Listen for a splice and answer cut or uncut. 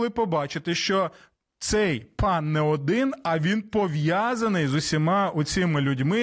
uncut